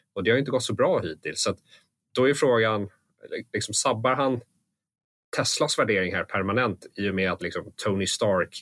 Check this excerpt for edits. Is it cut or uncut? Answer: cut